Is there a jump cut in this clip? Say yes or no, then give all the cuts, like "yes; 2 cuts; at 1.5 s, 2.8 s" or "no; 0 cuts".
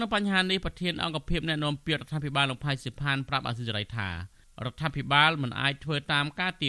no; 0 cuts